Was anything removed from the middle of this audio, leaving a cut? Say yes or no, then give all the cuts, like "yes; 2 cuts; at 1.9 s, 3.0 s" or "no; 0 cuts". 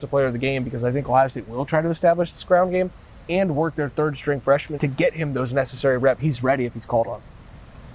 yes; 2 cuts; at 4.8 s, 6.2 s